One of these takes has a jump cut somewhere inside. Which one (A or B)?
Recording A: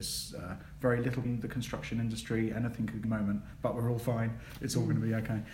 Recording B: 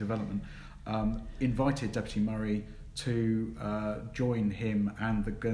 A